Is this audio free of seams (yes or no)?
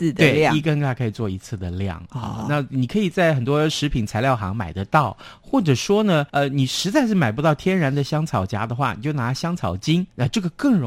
no